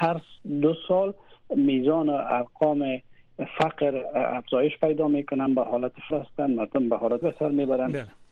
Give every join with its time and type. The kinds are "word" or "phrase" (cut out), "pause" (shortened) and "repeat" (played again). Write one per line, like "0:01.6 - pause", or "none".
0:05.5 - word
0:06.1 - word
0:07.2 - word